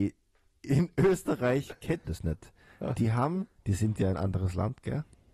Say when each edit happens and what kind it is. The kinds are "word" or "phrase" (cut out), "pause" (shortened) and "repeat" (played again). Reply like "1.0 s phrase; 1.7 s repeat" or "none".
2.0 s word; 3.5 s pause